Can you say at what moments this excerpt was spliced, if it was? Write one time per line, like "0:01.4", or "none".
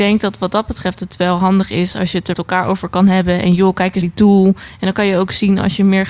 0:02.3
0:04.0